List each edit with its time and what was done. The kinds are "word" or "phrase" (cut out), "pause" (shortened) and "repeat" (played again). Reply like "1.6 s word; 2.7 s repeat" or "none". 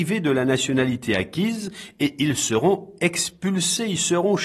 none